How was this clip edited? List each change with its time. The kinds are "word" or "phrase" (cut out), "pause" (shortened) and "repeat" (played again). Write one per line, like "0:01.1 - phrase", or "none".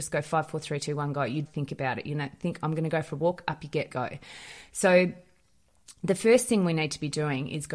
0:01.5 - word
0:03.9 - phrase